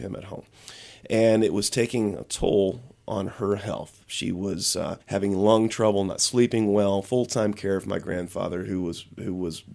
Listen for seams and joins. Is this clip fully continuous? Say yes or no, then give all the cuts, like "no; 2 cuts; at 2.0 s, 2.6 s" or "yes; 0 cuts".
no; 1 cut; at 5.0 s